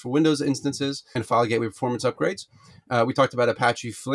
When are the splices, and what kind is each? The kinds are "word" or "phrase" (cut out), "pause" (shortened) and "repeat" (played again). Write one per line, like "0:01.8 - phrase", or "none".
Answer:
0:01.2 - word